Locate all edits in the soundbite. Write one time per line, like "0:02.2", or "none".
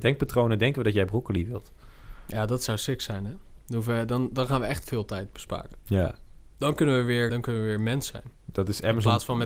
0:07.3